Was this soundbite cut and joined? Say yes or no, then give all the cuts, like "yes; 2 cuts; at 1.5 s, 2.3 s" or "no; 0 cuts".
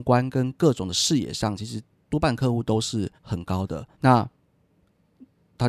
yes; 2 cuts; at 3.2 s, 3.9 s